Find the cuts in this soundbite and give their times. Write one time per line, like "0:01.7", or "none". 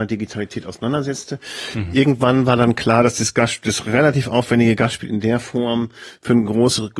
none